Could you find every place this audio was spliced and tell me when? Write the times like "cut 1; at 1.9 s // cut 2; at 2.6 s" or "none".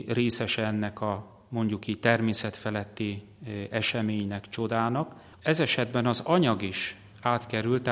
none